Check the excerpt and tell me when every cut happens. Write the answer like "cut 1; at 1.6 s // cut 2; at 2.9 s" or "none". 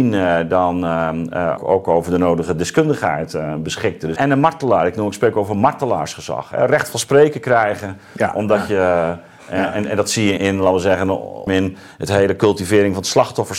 cut 1; at 1.6 s // cut 2; at 4.2 s // cut 3; at 10.4 s // cut 4; at 11.5 s